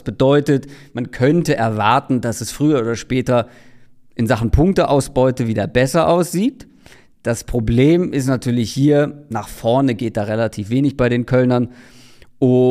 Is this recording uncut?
yes; 0 cuts

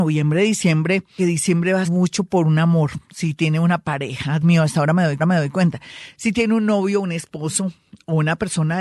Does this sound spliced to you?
yes; 4 cuts; at 1.2 s, 1.8 s, 4.4 s, 5.2 s

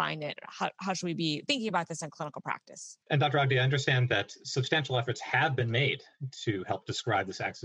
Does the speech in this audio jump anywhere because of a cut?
yes; 2 cuts; at 1.5 s, 3.0 s

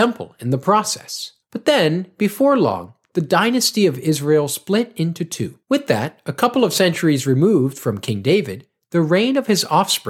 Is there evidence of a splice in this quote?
no; 0 cuts

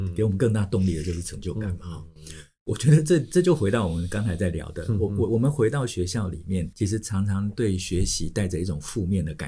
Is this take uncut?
no; 1 cut; at 6.7 s

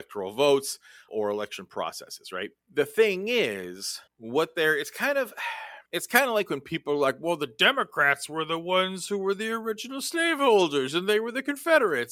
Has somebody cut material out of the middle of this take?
yes; 4 cuts; at 1.1 s, 2.6 s, 4.1 s, 5.9 s

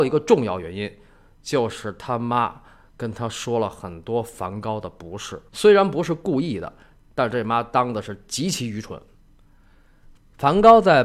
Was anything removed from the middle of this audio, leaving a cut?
yes; 1 cut; at 5.5 s

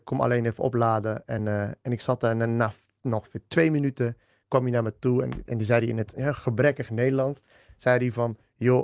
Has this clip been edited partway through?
no; 0 cuts

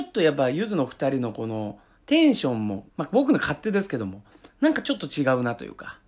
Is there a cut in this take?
yes; 1 cut; at 2.9 s

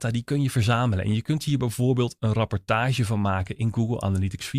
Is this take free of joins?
yes; 0 cuts

